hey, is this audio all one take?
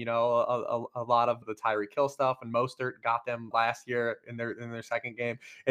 no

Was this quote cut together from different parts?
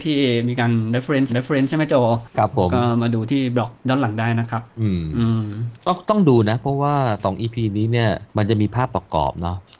yes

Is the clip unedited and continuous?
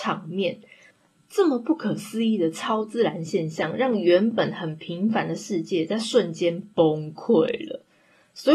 yes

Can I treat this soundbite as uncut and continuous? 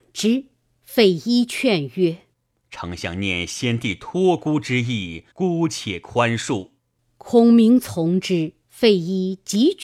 no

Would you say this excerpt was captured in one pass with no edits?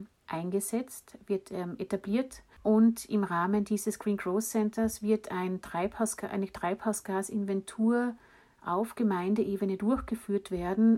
no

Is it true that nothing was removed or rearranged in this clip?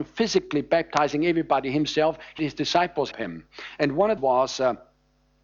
no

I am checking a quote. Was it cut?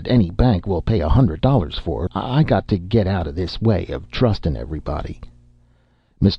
yes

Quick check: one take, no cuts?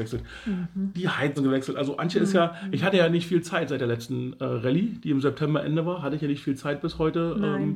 no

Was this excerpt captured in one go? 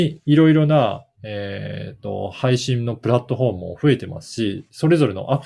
yes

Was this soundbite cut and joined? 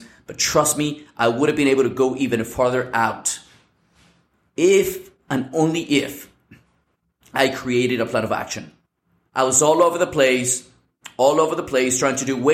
no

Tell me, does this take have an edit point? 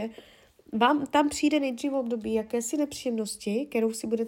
no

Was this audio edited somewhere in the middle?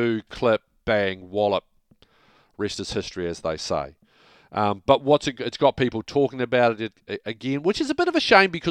no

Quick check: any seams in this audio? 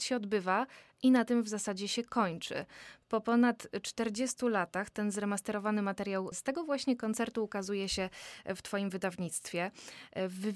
no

